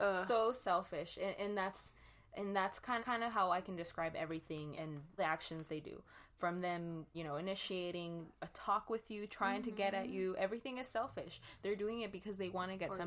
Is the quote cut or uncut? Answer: cut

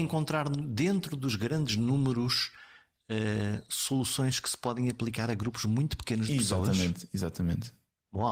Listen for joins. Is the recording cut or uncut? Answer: uncut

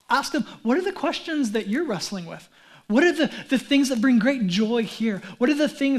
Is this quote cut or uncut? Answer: uncut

